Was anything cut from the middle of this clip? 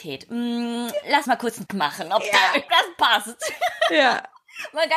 yes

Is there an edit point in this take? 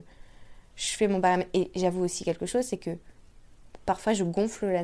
no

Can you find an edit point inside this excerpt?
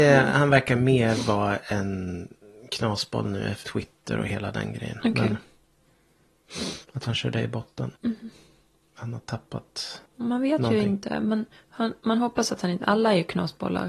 yes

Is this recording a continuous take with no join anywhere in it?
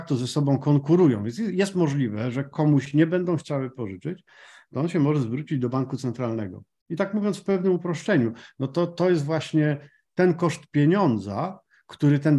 yes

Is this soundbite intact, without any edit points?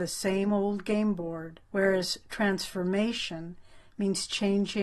no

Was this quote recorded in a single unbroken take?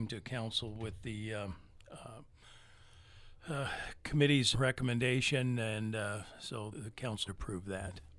no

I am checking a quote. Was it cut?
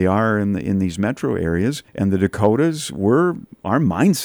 yes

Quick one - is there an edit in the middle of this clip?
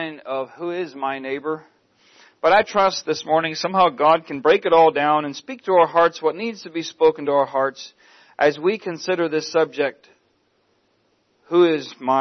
no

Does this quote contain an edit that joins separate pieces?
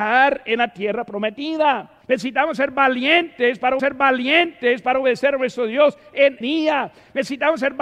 yes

